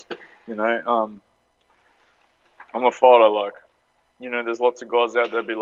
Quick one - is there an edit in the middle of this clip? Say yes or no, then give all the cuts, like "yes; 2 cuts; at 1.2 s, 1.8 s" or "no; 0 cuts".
no; 0 cuts